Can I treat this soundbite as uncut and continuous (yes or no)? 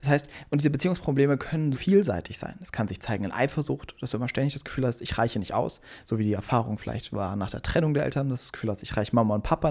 no